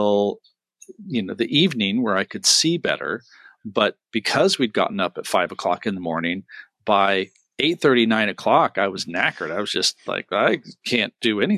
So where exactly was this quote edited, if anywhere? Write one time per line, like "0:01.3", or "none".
none

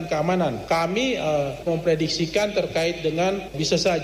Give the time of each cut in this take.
0:01.7

